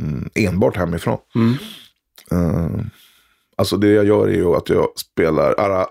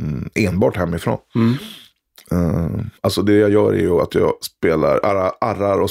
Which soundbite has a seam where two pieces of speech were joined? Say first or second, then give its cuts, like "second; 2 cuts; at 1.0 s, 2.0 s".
second; 1 cut; at 3.0 s